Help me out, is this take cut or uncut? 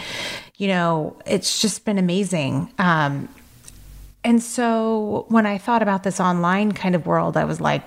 uncut